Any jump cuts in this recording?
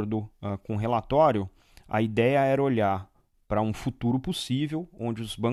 no; 0 cuts

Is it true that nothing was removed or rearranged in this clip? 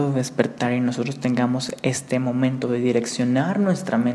yes; 0 cuts

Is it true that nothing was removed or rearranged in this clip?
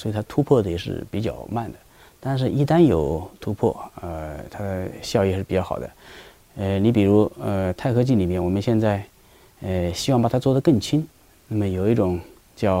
yes; 0 cuts

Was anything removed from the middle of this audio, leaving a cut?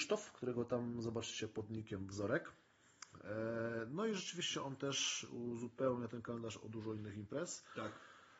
no; 0 cuts

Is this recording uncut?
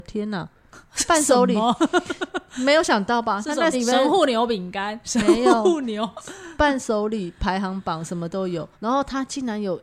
no; 2 cuts; at 3.7 s, 8.7 s

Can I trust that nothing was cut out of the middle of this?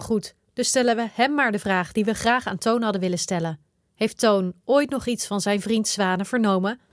yes; 0 cuts

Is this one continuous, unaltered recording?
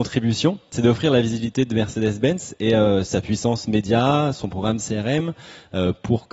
yes; 0 cuts

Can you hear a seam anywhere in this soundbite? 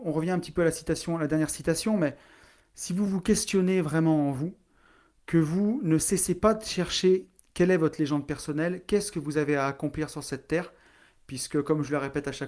no; 0 cuts

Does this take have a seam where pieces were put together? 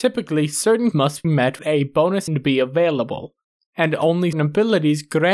yes; 5 cuts; at 0.9 s, 1.2 s, 1.6 s, 2.3 s, 4.3 s

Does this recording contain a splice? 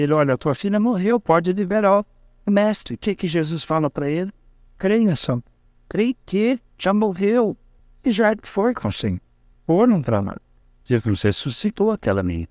no; 0 cuts

